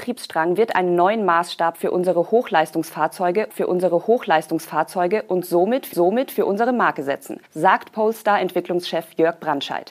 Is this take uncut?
no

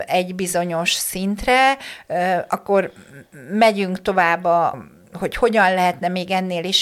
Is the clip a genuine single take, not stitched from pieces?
no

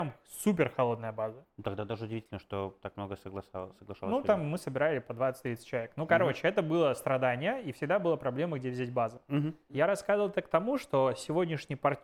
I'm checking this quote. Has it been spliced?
yes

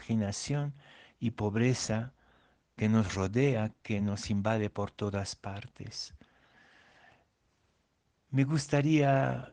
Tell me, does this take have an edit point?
no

